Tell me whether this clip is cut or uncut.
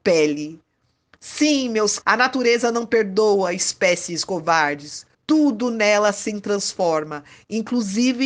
cut